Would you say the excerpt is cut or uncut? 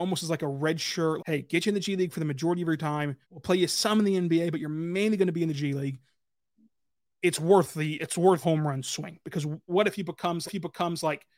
cut